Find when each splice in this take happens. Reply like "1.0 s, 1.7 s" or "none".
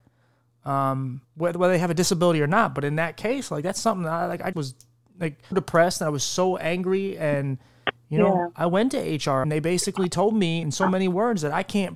1.2 s, 4.5 s, 5.5 s, 9.4 s, 10.6 s

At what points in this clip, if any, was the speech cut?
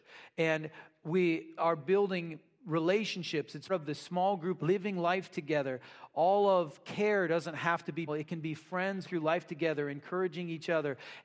1.6 s, 3.7 s, 4.6 s, 8.1 s, 9.0 s

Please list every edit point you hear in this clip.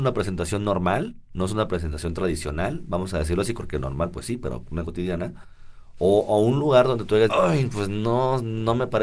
3.6 s, 4.8 s, 7.3 s

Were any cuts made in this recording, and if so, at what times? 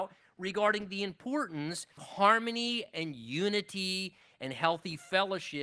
2.0 s

